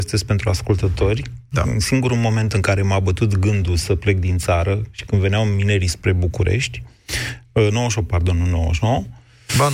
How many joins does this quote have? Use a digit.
0